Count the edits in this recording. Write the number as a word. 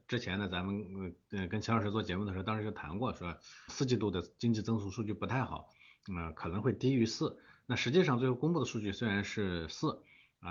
one